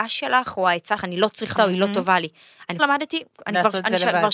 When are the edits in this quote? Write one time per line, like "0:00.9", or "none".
0:01.0
0:01.5
0:02.8